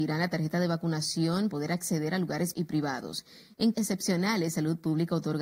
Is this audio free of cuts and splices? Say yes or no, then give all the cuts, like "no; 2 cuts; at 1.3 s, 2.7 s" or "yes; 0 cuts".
no; 3 cuts; at 1.5 s, 2.5 s, 3.7 s